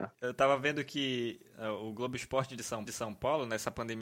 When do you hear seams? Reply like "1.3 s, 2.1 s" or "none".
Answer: 2.9 s